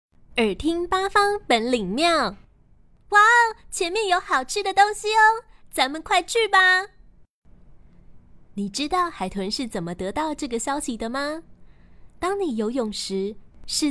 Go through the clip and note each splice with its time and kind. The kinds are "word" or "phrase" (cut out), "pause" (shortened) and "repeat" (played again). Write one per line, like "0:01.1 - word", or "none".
0:02.6 - pause